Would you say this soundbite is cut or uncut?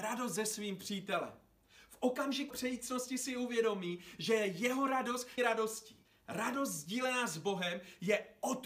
cut